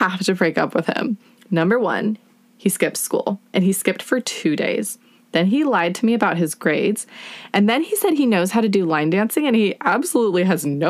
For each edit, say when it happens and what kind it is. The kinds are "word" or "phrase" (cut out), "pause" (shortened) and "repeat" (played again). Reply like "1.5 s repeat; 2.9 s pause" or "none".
none